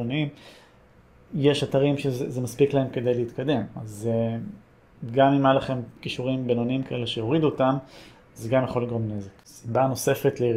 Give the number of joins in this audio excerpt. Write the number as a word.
one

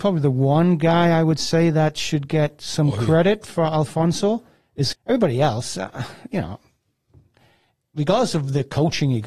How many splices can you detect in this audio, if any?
one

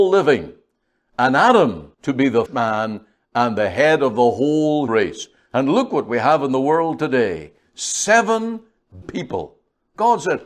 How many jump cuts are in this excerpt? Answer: four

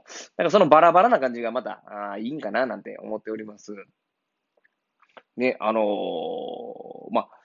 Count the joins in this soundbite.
zero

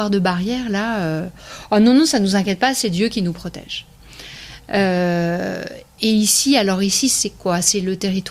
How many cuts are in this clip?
zero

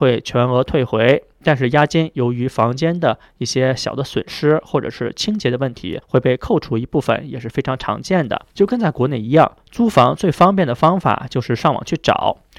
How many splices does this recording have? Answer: three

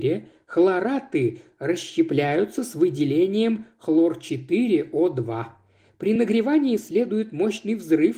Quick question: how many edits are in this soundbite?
zero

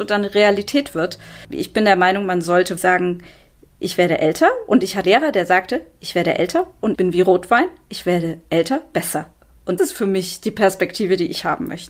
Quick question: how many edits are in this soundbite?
five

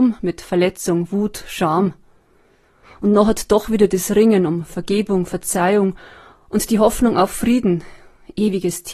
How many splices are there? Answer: zero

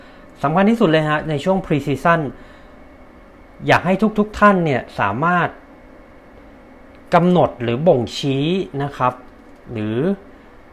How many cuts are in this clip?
zero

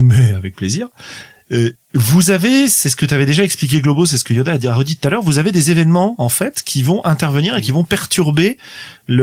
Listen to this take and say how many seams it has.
zero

